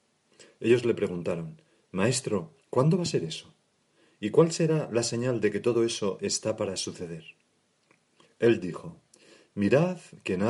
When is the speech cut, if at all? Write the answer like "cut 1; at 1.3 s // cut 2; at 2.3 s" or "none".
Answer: cut 1; at 2.6 s